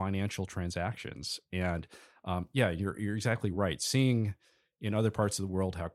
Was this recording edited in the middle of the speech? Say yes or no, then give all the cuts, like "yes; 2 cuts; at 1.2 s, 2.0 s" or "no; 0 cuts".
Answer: no; 0 cuts